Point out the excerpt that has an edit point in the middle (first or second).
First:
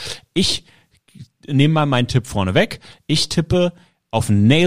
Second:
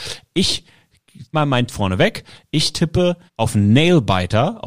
second